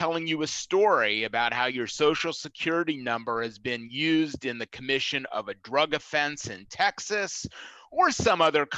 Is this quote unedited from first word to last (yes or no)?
yes